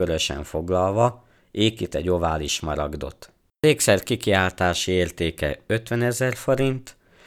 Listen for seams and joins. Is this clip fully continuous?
yes; 0 cuts

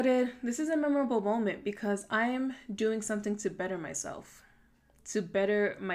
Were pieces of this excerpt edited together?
no; 0 cuts

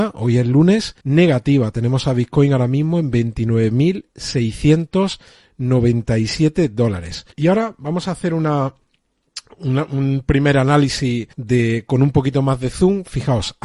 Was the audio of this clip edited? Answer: yes; 3 cuts; at 1.0 s, 7.3 s, 11.3 s

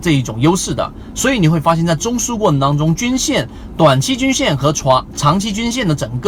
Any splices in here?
no; 0 cuts

